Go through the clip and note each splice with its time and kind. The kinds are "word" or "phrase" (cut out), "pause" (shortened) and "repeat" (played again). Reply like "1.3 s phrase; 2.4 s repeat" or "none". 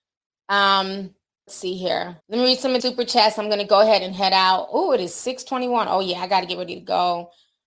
1.5 s word; 2.2 s pause; 2.8 s word